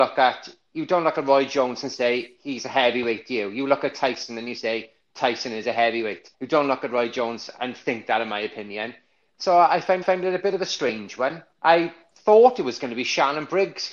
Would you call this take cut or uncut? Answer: cut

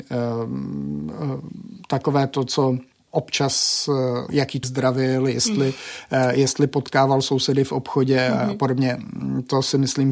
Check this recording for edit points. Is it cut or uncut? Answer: cut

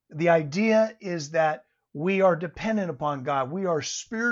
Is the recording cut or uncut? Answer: uncut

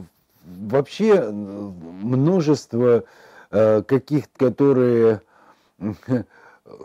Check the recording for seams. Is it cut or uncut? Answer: cut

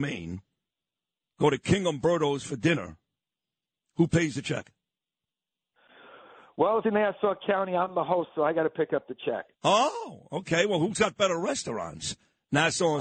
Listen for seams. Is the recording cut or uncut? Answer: cut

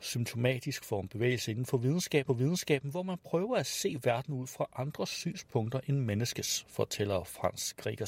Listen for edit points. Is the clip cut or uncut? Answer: cut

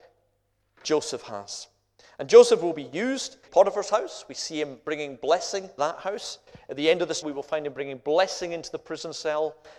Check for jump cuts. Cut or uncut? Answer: cut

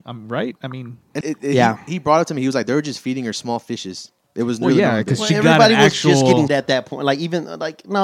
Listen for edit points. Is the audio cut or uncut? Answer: cut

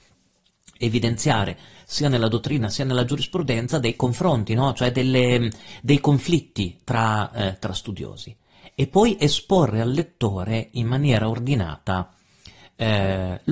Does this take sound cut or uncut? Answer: uncut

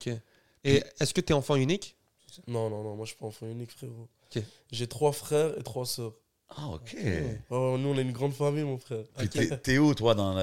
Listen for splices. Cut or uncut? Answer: uncut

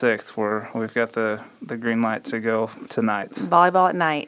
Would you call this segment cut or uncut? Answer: uncut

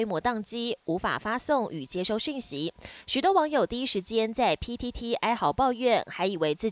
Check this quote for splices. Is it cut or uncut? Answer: uncut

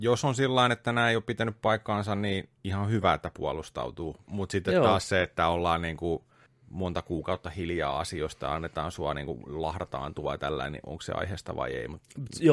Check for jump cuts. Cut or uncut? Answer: uncut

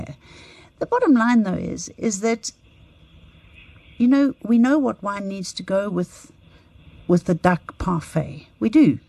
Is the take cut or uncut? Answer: uncut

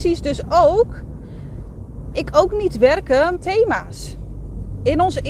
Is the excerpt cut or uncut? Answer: cut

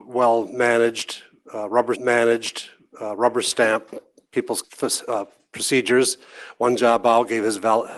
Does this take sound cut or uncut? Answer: cut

